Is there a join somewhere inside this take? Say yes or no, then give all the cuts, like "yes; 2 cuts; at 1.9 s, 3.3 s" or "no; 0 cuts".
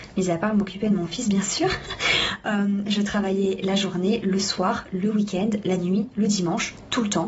no; 0 cuts